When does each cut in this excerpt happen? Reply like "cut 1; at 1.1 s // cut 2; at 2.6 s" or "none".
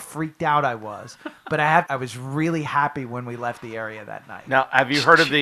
cut 1; at 1.9 s